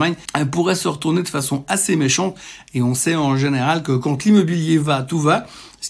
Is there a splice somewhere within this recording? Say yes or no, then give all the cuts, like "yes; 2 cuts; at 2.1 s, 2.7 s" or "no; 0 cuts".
no; 0 cuts